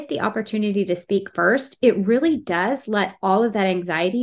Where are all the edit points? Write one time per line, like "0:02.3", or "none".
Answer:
none